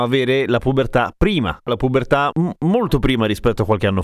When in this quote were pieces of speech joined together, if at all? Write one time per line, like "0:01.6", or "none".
0:01.7
0:02.3